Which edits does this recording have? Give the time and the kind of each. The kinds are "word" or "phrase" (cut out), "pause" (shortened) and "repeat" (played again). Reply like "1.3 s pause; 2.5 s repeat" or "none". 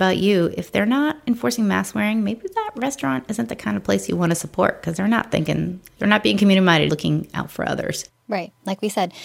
6.9 s word